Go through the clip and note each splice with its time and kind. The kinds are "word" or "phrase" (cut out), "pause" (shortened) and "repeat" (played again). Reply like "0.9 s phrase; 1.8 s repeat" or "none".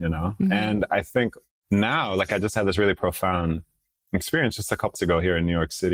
4.9 s word